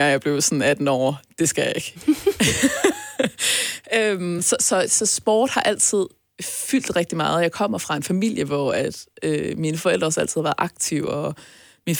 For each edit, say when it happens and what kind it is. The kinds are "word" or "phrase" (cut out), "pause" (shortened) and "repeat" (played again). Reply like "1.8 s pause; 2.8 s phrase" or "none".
none